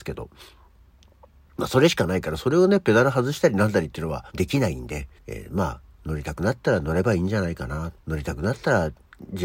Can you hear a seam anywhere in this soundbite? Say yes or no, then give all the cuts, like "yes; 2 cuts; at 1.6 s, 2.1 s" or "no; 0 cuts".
yes; 3 cuts; at 4.3 s, 5.2 s, 8.0 s